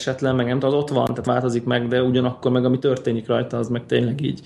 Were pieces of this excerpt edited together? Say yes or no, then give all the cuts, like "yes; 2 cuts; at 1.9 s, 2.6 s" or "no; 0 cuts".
yes; 1 cut; at 1.3 s